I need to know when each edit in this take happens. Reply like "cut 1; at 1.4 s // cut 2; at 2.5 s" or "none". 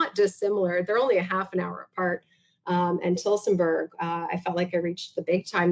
none